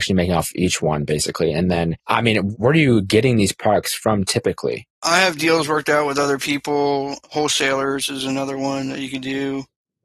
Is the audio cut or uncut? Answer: cut